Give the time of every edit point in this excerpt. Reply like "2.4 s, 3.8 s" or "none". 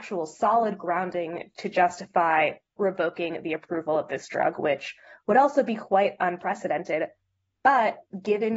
none